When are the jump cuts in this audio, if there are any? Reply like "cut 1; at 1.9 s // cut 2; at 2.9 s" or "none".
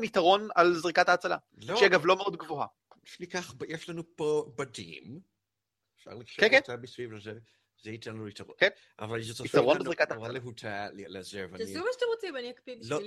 none